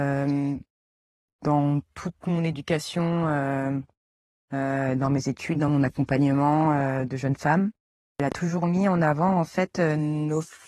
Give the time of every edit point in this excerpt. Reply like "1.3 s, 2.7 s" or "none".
none